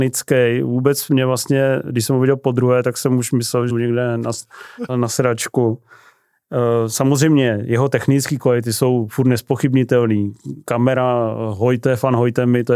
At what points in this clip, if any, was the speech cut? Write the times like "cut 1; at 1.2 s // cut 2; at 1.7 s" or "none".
cut 1; at 3.7 s // cut 2; at 4.9 s